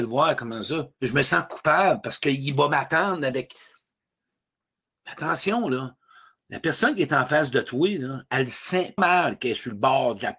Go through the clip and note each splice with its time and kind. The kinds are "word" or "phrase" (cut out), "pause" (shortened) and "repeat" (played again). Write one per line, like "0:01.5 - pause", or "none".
0:00.9 - pause
0:09.0 - word